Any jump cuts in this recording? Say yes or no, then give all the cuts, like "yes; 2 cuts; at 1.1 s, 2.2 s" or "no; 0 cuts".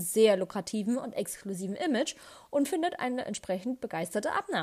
no; 0 cuts